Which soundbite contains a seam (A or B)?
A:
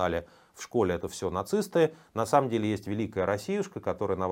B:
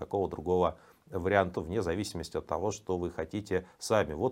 B